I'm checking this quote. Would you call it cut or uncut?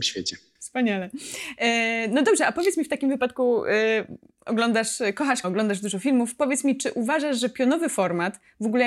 cut